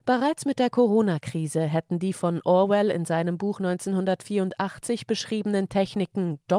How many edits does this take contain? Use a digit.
0